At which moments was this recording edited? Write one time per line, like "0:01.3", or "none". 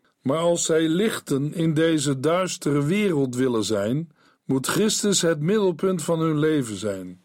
0:04.3